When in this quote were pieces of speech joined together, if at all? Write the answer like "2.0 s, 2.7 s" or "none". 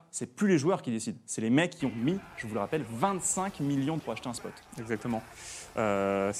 4.0 s